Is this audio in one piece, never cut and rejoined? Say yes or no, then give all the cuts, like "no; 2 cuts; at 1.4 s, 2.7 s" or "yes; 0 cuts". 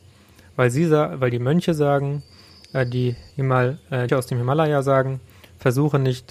no; 2 cuts; at 3.3 s, 4.1 s